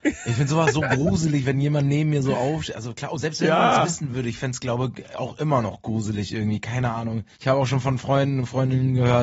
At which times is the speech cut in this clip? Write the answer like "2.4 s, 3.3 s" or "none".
7.3 s